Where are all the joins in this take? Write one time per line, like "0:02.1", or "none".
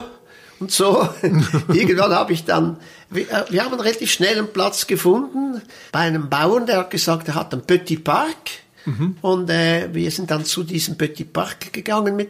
0:05.9
0:08.8